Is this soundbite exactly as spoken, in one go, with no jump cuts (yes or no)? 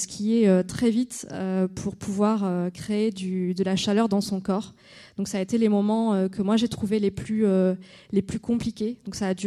yes